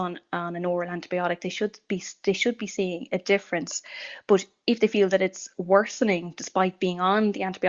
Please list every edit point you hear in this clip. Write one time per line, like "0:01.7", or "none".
none

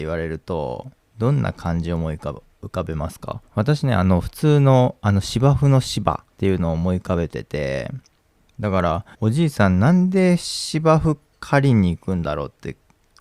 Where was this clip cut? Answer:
0:03.5
0:06.3
0:08.2
0:09.1

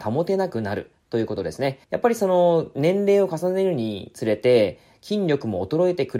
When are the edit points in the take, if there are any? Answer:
0:01.8

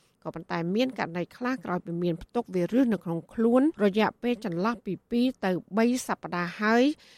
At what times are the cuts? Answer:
0:03.7

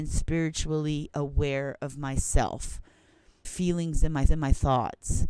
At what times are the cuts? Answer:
0:03.4
0:04.3

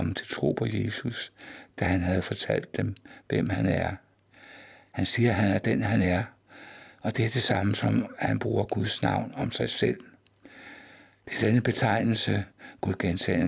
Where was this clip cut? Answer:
none

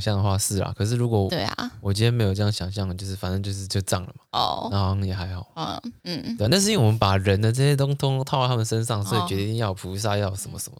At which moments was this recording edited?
0:04.3
0:06.0

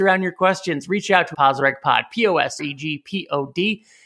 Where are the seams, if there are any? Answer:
0:01.3
0:02.6

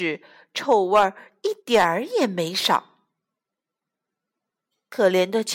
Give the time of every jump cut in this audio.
0:01.6

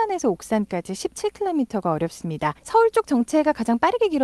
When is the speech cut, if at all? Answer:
0:02.6

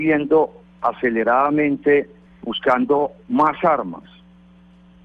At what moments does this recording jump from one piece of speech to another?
0:02.3

